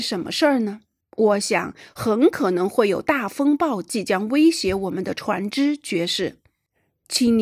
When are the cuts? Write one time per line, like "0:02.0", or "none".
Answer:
0:01.0